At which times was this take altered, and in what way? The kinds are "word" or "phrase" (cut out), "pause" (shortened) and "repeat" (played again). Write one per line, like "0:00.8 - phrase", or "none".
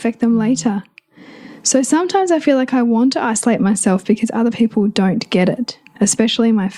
none